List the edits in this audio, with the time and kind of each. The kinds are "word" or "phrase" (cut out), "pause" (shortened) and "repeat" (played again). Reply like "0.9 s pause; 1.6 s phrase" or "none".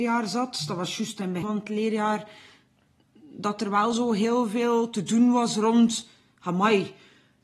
1.4 s word